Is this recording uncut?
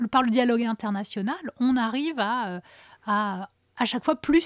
yes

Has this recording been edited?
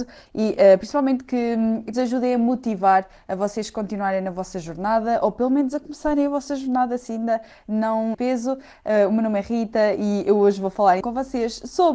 yes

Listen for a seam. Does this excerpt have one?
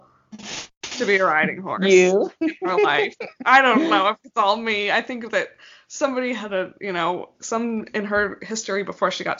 no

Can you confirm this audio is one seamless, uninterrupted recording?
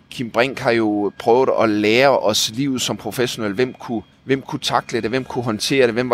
no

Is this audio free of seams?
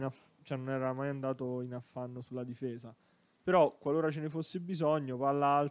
yes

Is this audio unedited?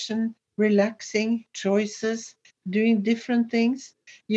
yes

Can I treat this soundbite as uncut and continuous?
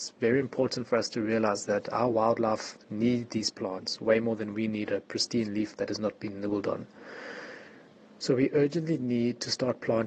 yes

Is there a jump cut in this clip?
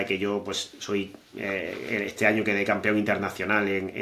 no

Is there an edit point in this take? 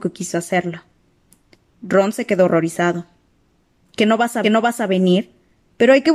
yes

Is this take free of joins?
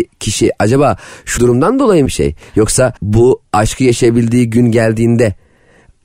no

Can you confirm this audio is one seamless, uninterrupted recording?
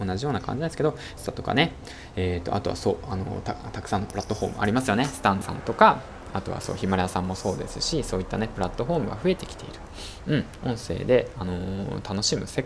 no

